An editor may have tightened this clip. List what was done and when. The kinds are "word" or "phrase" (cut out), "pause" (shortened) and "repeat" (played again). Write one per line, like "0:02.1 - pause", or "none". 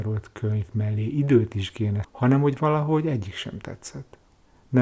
0:02.0 - word